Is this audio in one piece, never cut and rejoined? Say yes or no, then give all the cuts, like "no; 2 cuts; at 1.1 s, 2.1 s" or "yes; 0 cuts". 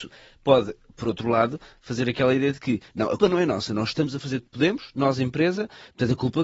no; 2 cuts; at 3.2 s, 4.4 s